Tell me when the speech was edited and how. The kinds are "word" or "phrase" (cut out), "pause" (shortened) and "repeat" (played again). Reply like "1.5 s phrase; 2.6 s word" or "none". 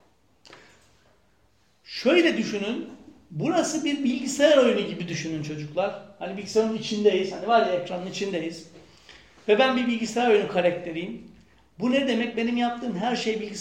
none